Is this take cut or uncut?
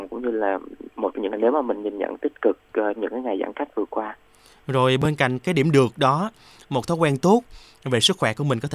cut